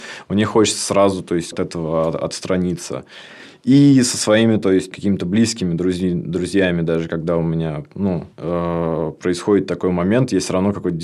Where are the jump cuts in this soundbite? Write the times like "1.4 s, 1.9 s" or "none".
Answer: 1.5 s, 4.9 s, 8.3 s